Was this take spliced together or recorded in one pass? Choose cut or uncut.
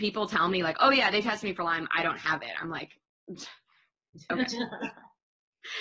uncut